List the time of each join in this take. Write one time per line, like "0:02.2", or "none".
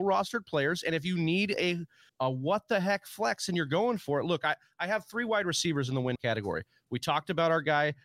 0:02.1
0:06.2